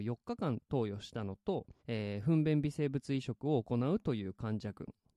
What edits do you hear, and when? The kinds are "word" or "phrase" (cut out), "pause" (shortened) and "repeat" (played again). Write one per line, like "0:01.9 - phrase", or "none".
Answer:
0:01.8 - pause